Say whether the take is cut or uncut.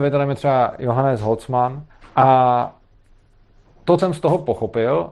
cut